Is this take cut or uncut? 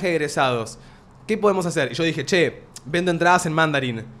uncut